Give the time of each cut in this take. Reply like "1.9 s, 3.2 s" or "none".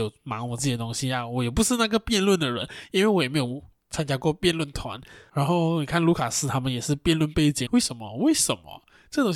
7.7 s